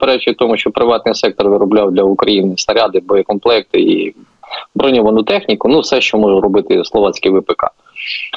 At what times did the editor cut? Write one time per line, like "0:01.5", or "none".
none